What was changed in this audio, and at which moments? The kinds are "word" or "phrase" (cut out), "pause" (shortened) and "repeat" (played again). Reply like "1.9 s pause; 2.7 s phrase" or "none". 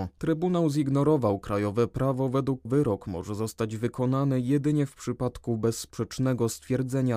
2.7 s word